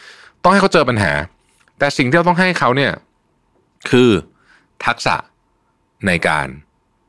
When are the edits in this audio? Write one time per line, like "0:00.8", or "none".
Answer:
none